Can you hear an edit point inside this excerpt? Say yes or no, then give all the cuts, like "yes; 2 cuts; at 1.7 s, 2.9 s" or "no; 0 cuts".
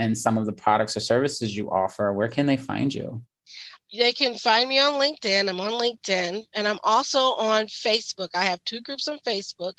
no; 0 cuts